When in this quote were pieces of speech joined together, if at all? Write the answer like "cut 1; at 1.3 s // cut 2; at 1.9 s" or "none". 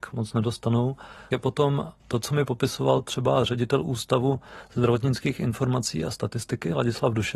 cut 1; at 2.0 s